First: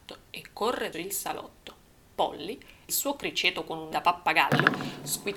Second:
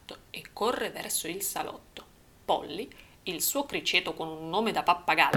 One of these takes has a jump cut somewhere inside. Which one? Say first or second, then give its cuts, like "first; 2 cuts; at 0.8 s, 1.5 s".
first; 3 cuts; at 0.9 s, 2.9 s, 3.9 s